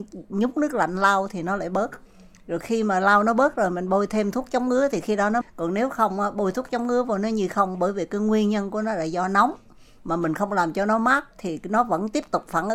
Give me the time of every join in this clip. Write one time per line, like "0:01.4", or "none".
0:05.4